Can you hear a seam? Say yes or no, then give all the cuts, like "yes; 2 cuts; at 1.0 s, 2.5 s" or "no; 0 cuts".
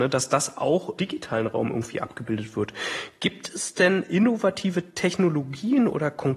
yes; 1 cut; at 1.0 s